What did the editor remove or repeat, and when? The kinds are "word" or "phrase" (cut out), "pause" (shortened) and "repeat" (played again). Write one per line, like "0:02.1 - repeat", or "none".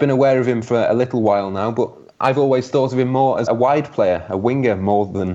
0:03.5 - word